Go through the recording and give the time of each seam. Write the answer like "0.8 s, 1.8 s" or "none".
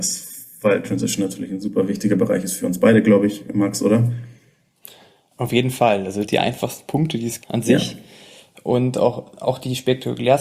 6.3 s, 7.4 s